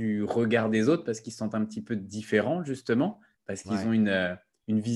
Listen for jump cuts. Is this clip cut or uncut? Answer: uncut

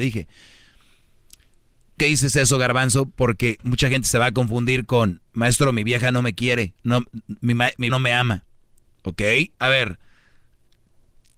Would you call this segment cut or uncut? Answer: cut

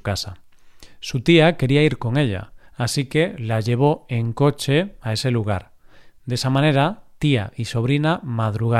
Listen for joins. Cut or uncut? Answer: cut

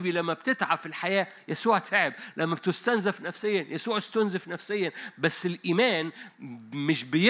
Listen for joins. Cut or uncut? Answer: uncut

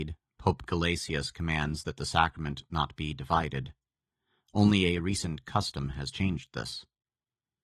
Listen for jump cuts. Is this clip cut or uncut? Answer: uncut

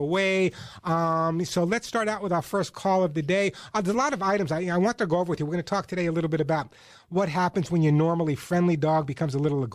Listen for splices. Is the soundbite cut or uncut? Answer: uncut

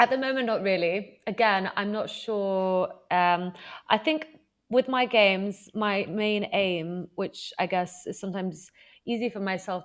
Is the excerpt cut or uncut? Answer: uncut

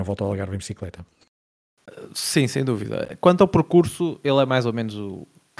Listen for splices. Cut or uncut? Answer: uncut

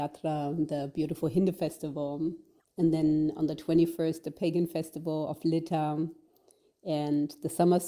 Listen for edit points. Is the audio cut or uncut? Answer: uncut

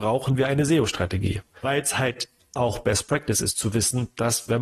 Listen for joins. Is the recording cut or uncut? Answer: uncut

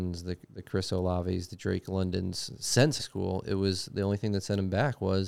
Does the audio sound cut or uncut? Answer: cut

